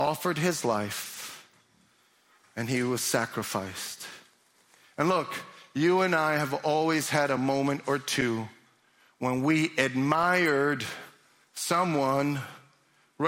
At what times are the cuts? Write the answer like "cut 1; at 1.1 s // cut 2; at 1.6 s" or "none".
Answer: none